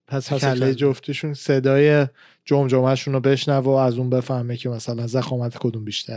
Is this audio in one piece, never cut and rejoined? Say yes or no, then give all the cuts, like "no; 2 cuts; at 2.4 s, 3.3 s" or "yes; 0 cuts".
yes; 0 cuts